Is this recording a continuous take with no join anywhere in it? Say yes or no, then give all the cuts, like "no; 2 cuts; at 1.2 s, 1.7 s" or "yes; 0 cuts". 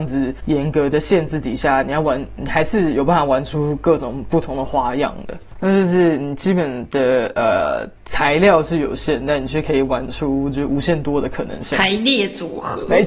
no; 1 cut; at 8.0 s